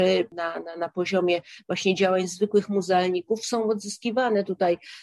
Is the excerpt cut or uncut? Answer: uncut